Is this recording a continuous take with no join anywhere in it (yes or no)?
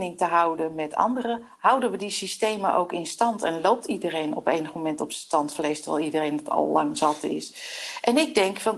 yes